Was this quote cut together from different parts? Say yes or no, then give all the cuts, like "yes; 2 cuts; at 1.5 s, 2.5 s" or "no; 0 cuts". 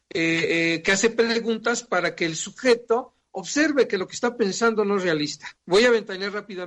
yes; 1 cut; at 5.6 s